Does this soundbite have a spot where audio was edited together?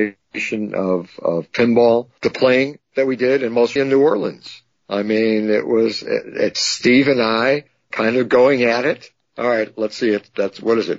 yes; 1 cut; at 3.8 s

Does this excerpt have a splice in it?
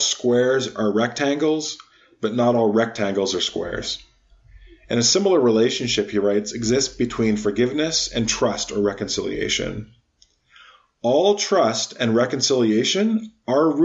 no; 0 cuts

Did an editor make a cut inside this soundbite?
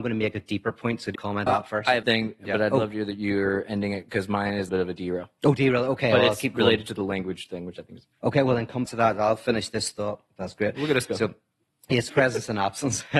yes; 6 cuts; at 1.2 s, 1.5 s, 2.0 s, 4.7 s, 8.9 s, 12.1 s

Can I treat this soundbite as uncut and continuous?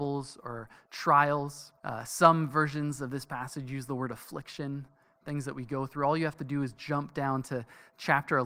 no; 1 cut; at 1.8 s

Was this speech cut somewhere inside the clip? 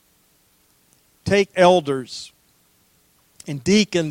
yes; 1 cut; at 1.5 s

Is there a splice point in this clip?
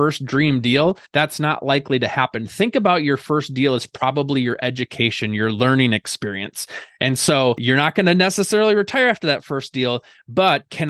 yes; 1 cut; at 1.1 s

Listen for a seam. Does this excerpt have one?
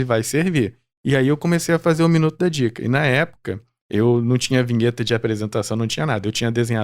no; 0 cuts

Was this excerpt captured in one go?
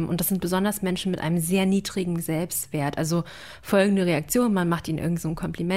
yes; 0 cuts

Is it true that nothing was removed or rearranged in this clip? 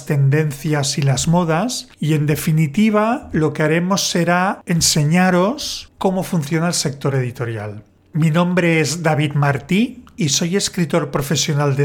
yes; 0 cuts

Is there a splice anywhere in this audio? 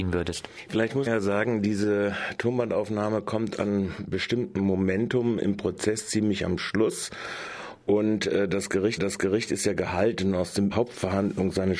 yes; 3 cuts; at 1.1 s, 9.0 s, 10.7 s

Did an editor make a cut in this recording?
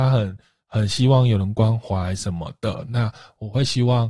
no; 0 cuts

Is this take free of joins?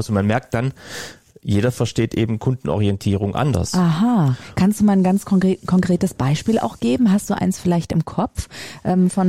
yes; 0 cuts

